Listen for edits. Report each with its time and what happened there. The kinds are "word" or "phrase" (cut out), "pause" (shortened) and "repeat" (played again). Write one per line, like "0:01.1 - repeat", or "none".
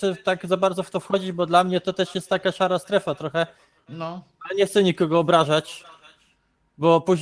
none